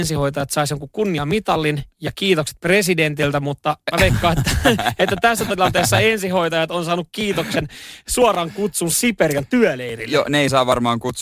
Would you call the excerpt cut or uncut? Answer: uncut